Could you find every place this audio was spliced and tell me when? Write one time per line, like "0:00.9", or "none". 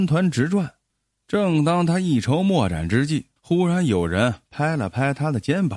0:03.4